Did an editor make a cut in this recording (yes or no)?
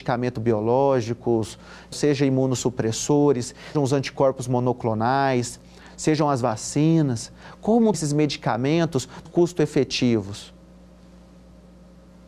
yes